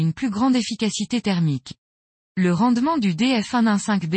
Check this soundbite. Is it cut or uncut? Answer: uncut